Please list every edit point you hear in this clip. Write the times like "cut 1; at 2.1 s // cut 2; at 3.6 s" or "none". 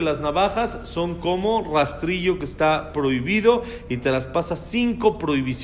none